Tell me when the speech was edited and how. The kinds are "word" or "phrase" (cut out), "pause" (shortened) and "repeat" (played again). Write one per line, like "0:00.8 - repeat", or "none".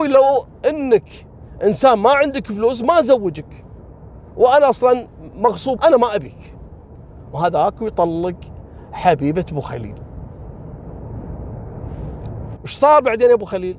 0:05.8 - word
0:07.3 - word
0:12.6 - word

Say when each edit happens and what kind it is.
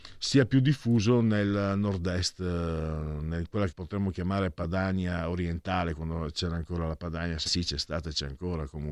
0:03.7 - word
0:07.5 - phrase

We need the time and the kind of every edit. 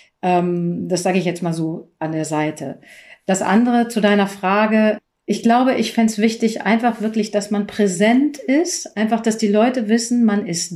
none

